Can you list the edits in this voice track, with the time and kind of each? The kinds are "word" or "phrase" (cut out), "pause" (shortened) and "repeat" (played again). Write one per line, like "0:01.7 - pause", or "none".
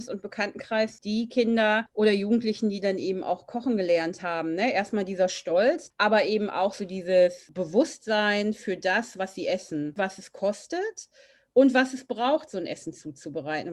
none